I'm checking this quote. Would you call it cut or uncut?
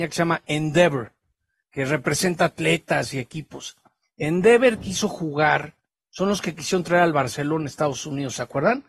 uncut